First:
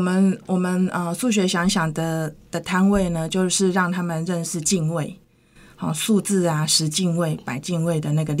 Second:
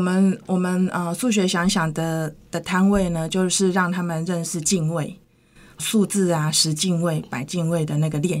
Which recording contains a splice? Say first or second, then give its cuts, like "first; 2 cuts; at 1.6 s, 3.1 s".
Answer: second; 1 cut; at 5.8 s